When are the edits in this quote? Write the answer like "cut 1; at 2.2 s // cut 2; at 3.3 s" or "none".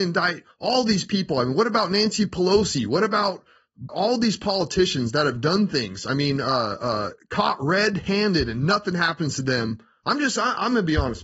cut 1; at 3.9 s